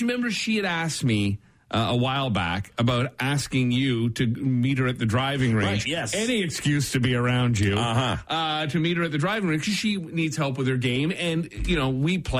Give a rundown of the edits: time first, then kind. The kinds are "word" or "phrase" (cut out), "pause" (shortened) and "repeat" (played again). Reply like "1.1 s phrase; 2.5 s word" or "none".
none